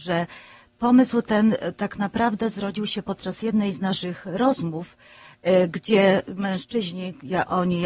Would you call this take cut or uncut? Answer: uncut